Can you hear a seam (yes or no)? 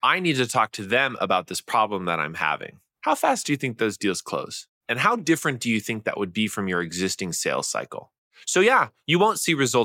no